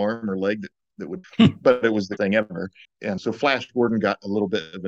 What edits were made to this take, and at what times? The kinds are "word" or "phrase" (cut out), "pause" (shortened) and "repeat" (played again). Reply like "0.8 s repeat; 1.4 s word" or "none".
1.2 s word; 2.2 s word; 2.8 s word; 3.2 s word